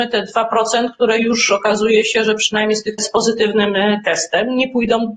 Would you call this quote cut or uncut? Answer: cut